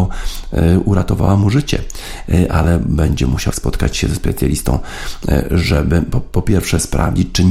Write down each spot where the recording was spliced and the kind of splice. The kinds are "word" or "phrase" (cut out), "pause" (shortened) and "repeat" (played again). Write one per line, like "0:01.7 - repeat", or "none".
0:03.5 - word